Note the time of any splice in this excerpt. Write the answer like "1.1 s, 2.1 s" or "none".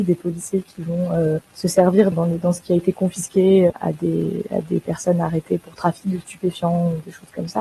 1.5 s, 2.1 s, 3.7 s